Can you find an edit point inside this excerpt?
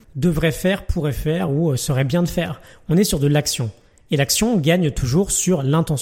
no; 0 cuts

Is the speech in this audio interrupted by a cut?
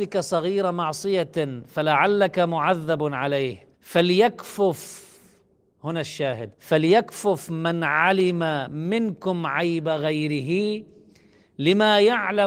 yes; 2 cuts; at 3.7 s, 6.5 s

